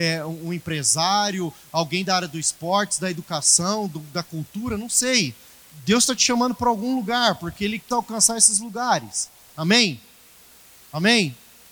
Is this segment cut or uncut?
cut